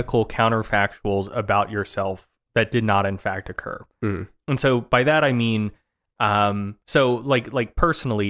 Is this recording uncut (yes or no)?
no